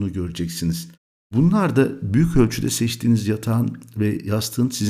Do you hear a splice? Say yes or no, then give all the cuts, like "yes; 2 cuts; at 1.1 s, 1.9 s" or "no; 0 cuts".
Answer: no; 0 cuts